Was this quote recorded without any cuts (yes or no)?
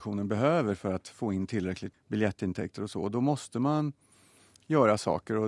no